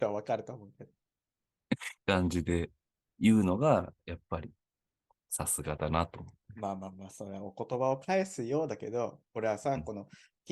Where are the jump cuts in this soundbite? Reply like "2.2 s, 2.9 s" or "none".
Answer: 2.0 s